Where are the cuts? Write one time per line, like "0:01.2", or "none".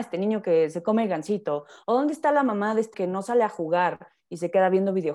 0:02.9